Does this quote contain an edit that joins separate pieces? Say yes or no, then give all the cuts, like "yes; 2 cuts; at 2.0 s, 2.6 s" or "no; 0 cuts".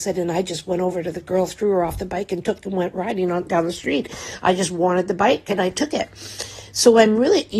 yes; 1 cut; at 2.6 s